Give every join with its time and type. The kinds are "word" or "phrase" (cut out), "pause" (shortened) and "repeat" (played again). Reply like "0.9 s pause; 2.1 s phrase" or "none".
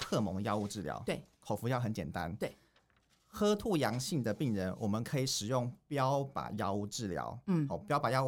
none

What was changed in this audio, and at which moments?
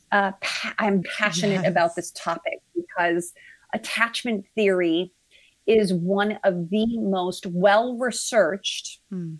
1.0 s word

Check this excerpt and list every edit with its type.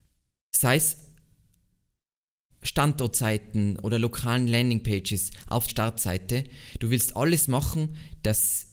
2.5 s word; 5.7 s word

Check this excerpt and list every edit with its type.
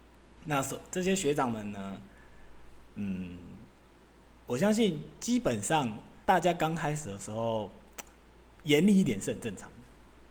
6.2 s pause; 8.5 s word

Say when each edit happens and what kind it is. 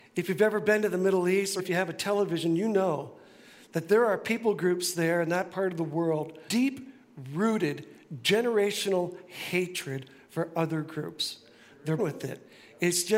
1.6 s word; 6.5 s word; 12.0 s word

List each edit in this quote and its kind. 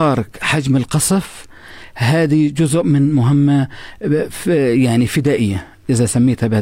none

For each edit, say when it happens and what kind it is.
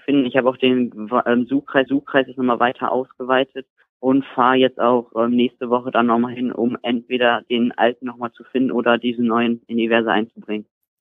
1.9 s repeat; 3.8 s pause

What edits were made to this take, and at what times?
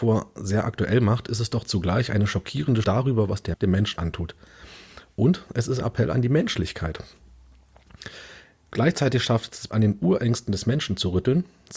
2.8 s word; 3.5 s word; 4.0 s word; 5.8 s word; 9.7 s word

